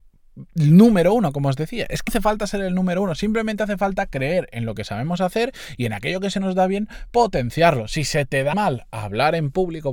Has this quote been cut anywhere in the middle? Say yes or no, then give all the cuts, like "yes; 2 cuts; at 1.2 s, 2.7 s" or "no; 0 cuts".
yes; 2 cuts; at 2.1 s, 8.5 s